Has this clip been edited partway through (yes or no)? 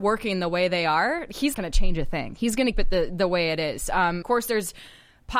yes